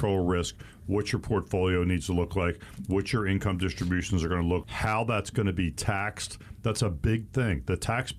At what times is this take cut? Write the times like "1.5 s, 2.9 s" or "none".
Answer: 4.6 s